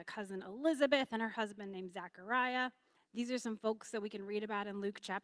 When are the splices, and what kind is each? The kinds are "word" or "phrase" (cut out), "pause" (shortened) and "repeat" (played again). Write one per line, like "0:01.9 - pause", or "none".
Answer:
0:02.9 - pause